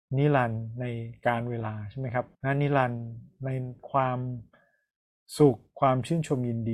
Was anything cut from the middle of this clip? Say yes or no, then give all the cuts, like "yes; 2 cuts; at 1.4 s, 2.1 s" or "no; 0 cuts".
yes; 1 cut; at 2.3 s